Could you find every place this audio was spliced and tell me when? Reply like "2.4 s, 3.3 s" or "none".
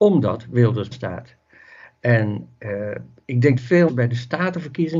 0.9 s, 3.6 s, 3.9 s